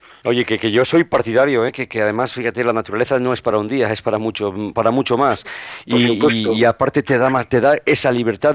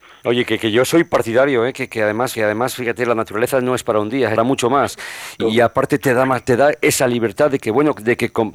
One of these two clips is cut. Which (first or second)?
second